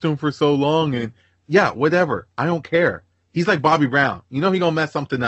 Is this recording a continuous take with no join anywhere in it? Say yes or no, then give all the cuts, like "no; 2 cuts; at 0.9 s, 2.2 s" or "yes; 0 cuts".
yes; 0 cuts